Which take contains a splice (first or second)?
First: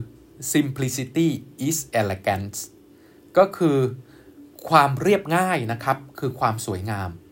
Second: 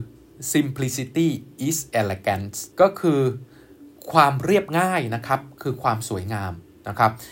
second